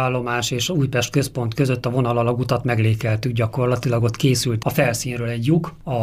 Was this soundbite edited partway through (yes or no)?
no